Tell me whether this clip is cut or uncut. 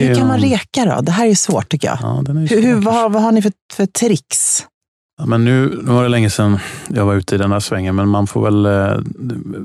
uncut